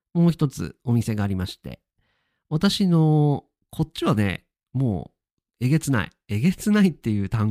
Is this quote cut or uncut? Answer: uncut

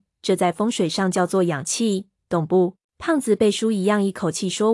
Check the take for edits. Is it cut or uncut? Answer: cut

